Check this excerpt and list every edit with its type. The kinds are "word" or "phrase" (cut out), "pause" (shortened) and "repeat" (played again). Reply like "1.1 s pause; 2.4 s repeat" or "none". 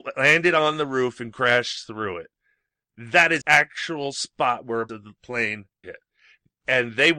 3.4 s word; 4.9 s word; 5.8 s word